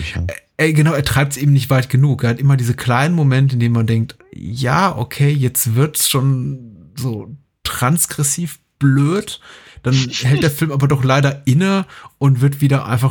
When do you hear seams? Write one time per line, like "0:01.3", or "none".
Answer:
none